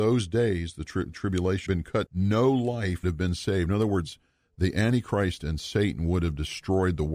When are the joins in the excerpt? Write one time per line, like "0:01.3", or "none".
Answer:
0:01.1
0:01.7
0:02.1
0:03.0